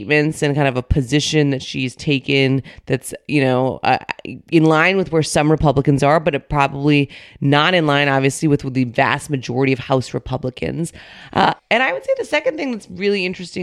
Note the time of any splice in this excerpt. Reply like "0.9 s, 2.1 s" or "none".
11.6 s